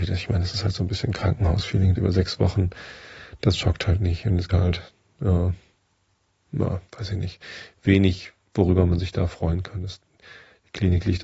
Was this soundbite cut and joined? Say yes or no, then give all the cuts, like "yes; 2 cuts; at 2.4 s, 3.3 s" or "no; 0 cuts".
yes; 3 cuts; at 2.0 s, 4.5 s, 6.9 s